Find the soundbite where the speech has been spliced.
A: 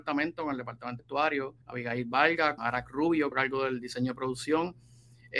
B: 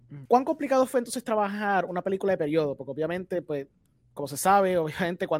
A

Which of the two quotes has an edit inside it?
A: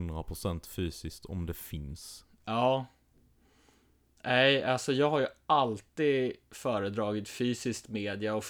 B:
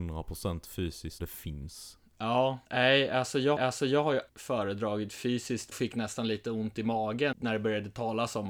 B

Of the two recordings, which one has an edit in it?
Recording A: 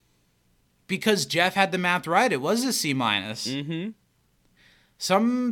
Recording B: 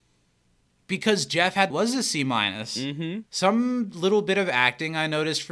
B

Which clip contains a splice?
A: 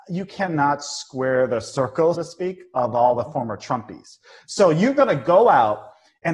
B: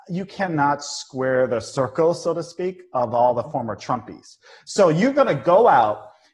A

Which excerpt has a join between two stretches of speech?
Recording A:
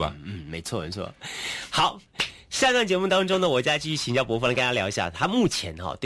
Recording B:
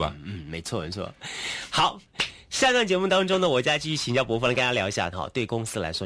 B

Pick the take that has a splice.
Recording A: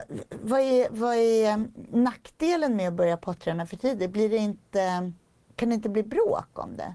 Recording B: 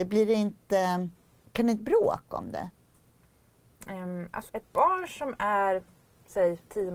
B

